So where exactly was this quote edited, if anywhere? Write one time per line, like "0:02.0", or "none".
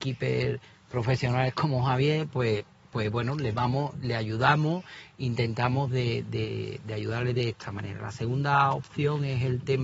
none